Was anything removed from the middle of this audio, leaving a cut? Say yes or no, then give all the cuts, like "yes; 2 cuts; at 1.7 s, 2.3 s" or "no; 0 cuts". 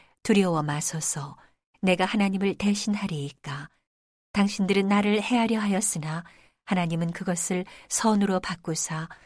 no; 0 cuts